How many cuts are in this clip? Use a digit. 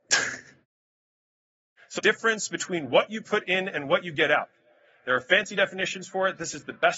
1